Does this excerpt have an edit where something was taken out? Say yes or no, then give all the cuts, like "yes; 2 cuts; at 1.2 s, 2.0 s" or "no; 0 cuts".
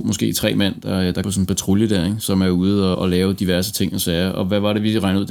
yes; 2 cuts; at 1.2 s, 2.9 s